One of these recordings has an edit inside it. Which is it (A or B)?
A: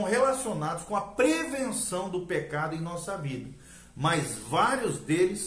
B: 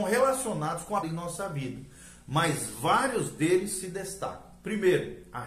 B